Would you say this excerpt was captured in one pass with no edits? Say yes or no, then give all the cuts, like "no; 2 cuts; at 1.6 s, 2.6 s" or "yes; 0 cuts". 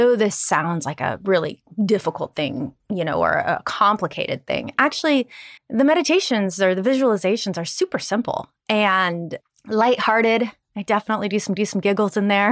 no; 2 cuts; at 5.6 s, 11.6 s